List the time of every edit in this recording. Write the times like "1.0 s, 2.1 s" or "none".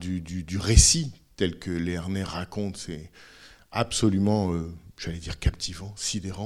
none